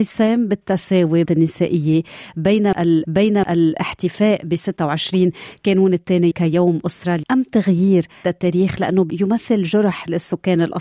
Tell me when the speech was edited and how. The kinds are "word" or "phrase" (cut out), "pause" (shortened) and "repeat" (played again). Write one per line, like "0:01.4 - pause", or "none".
0:01.2 - word
0:03.0 - repeat
0:06.3 - word
0:07.2 - word
0:08.2 - word